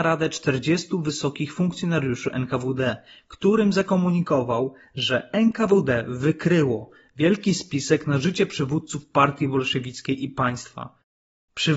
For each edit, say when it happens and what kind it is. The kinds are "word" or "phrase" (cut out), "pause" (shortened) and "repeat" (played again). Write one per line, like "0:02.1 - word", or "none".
none